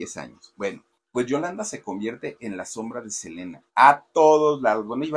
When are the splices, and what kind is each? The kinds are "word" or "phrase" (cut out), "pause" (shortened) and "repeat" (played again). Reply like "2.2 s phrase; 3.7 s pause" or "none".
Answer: 0.9 s pause; 3.7 s pause